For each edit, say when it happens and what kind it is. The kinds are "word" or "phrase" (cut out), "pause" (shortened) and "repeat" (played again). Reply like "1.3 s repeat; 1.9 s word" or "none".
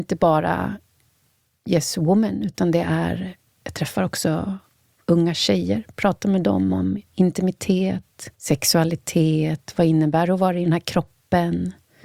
8.3 s pause